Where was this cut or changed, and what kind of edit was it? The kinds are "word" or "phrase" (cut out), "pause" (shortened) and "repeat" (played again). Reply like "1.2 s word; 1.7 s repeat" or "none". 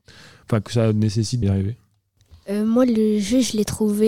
1.4 s phrase